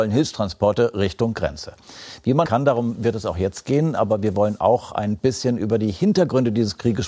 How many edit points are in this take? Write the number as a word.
one